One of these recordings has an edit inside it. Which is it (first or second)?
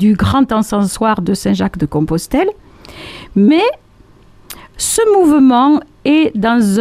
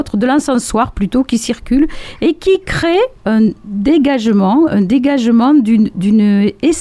second